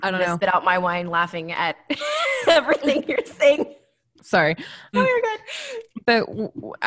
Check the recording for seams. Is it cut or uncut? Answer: cut